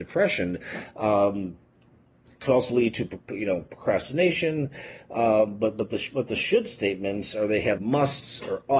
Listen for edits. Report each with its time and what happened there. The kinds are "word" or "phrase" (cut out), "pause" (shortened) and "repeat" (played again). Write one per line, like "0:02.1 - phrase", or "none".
0:07.8 - word